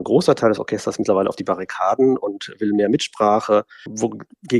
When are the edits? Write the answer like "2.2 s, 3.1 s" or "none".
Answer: none

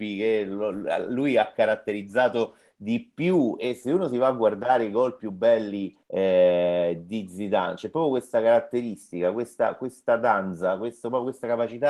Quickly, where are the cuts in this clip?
6.0 s

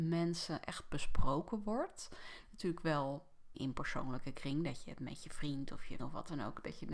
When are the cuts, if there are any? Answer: 3.5 s, 6.0 s

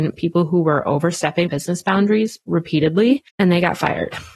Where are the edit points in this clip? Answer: 1.5 s, 3.3 s

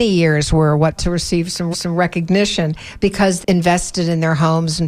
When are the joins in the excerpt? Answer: 1.0 s, 1.7 s, 3.4 s

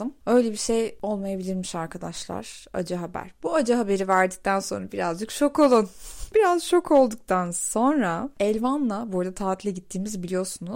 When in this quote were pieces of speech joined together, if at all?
none

